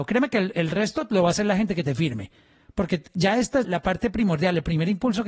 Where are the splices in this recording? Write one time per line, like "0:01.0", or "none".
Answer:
0:03.6